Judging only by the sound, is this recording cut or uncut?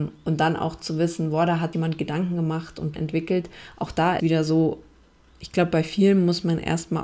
cut